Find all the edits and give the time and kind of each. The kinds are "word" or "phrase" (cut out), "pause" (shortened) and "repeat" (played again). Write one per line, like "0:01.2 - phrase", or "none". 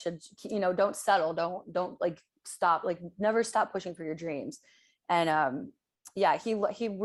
none